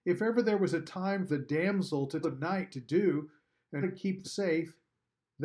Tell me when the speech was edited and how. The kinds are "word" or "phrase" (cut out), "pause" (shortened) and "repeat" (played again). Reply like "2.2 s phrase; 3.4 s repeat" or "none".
1.3 s word; 2.2 s word; 2.7 s word; 3.8 s word; 4.2 s word